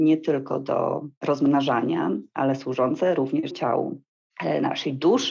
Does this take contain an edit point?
yes; 1 cut; at 3.5 s

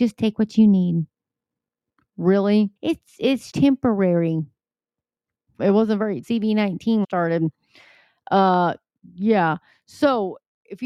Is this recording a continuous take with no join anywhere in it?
no; 5 cuts; at 2.8 s, 3.5 s, 5.6 s, 6.2 s, 7.0 s

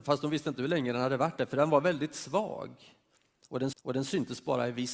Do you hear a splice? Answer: yes; 1 cut; at 3.7 s

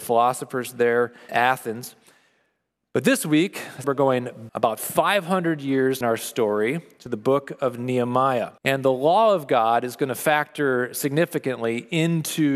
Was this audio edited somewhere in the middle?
yes; 5 cuts; at 1.3 s, 3.8 s, 4.5 s, 6.0 s, 8.6 s

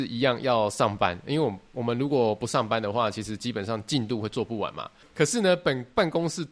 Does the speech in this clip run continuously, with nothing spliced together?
yes; 0 cuts

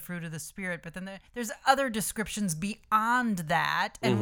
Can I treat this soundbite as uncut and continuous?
no; 1 cut; at 1.3 s

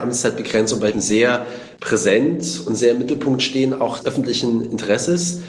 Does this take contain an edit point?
yes; 3 cuts; at 0.9 s, 1.8 s, 4.0 s

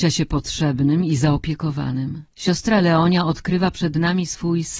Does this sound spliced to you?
yes; 1 cut; at 2.3 s

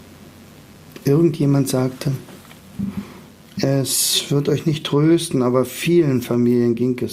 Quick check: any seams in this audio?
no; 0 cuts

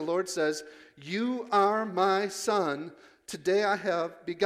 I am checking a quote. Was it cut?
no; 0 cuts

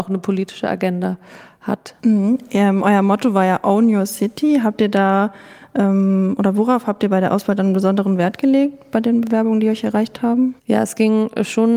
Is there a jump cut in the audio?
yes; 2 cuts; at 2.0 s, 10.6 s

